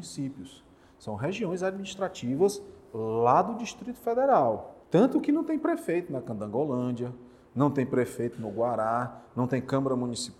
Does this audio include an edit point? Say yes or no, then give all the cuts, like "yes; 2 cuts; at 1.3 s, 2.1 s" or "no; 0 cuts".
yes; 1 cut; at 4.8 s